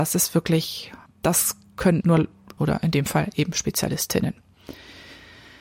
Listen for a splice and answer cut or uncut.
cut